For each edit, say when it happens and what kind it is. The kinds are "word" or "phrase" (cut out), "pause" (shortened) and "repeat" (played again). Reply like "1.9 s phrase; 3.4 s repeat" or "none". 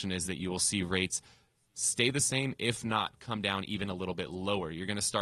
none